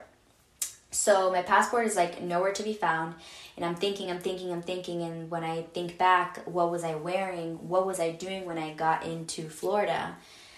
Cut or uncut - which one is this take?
uncut